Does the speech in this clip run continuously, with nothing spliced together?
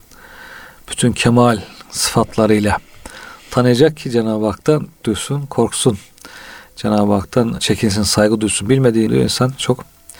no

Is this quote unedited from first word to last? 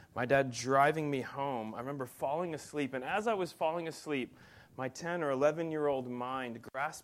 yes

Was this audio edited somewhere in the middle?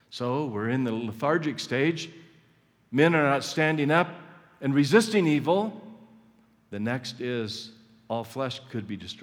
no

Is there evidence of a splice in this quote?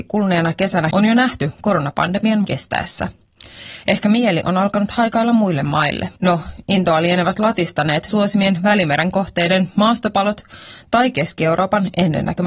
yes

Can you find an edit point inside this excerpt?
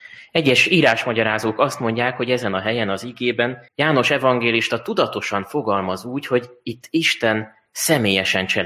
yes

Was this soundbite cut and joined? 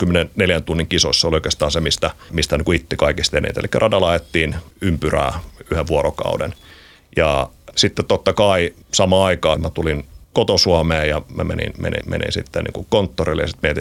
yes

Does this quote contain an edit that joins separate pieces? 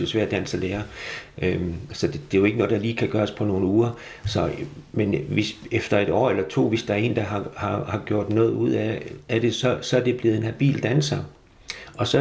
no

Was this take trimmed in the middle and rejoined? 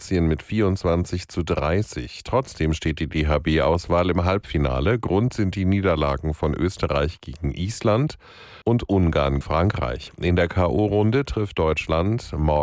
yes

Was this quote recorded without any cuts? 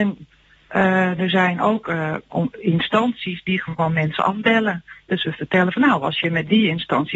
yes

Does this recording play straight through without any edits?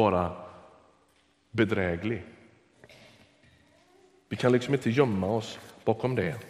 yes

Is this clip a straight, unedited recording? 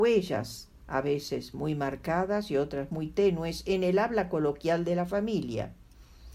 yes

